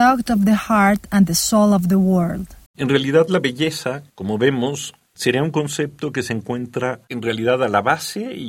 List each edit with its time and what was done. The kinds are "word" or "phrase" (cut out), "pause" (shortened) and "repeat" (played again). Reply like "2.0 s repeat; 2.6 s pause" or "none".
2.7 s pause; 4.1 s pause

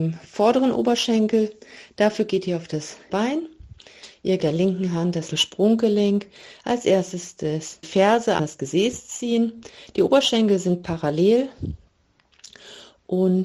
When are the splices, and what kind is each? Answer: 3.1 s word; 4.4 s phrase; 5.3 s word; 7.8 s word; 8.4 s word

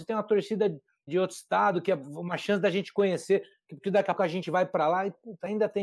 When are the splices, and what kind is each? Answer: 1.1 s word; 4.2 s word

